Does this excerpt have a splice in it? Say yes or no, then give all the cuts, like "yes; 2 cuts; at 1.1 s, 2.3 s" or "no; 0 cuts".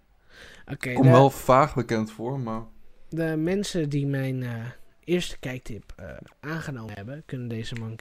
yes; 1 cut; at 6.3 s